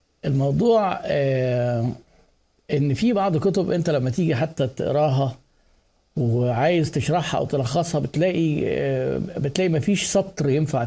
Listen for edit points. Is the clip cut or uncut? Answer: uncut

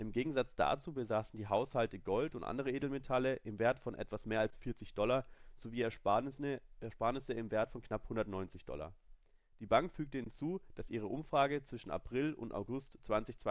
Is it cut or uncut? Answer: uncut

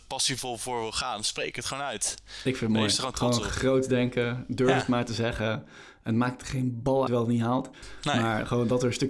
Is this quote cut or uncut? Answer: cut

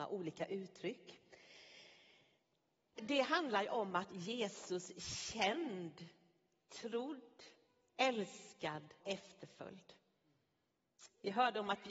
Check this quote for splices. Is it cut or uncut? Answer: cut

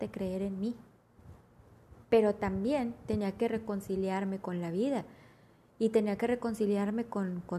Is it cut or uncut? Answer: cut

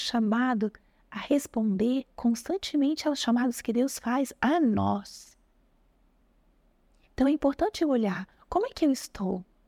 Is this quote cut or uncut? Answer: uncut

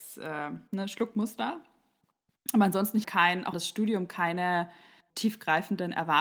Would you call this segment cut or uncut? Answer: cut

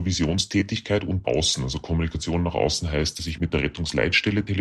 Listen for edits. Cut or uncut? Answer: cut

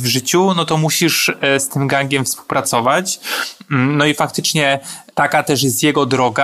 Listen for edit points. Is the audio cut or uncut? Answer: uncut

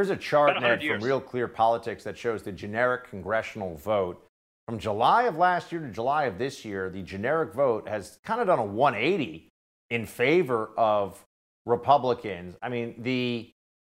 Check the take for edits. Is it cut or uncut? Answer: uncut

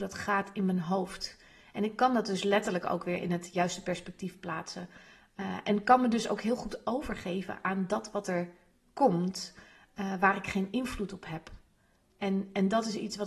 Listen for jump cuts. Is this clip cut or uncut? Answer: uncut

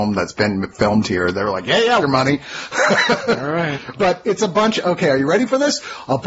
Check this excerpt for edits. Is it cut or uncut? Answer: cut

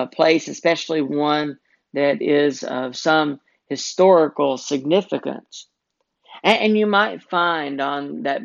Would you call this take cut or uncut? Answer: uncut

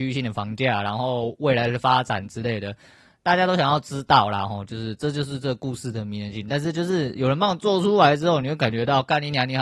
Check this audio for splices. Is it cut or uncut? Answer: uncut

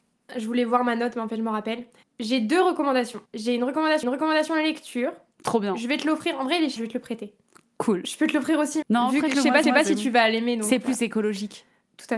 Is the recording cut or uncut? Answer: cut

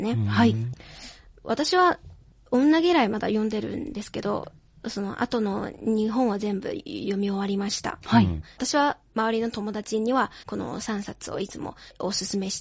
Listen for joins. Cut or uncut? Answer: cut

